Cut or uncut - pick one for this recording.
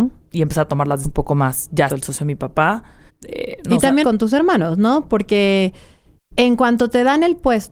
cut